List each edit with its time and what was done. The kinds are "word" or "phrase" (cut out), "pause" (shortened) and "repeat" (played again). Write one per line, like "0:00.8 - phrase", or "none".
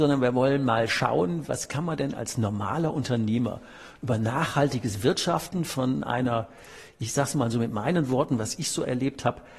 none